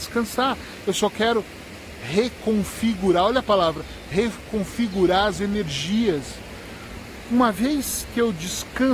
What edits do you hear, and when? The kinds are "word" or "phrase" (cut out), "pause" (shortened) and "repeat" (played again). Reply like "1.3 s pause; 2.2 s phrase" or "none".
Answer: 5.4 s word